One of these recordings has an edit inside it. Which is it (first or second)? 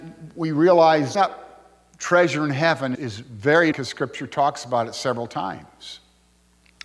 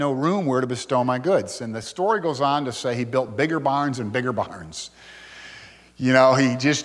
first